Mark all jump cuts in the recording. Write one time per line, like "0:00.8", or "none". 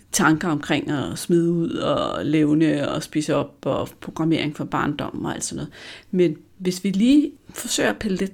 none